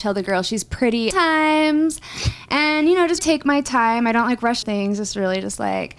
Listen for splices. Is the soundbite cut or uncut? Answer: cut